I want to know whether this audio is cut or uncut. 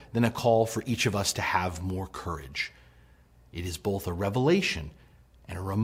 uncut